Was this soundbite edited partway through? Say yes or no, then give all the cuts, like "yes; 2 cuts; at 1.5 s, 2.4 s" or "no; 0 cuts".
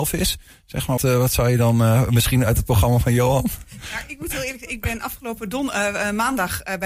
yes; 1 cut; at 1.0 s